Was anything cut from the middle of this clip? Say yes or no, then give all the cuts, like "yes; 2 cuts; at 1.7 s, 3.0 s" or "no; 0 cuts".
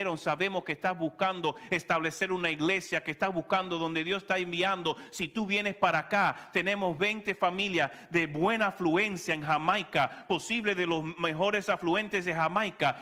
no; 0 cuts